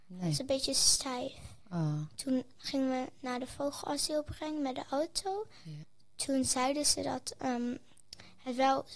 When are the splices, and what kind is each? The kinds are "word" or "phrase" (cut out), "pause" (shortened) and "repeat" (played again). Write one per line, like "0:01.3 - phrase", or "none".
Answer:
0:01.6 - pause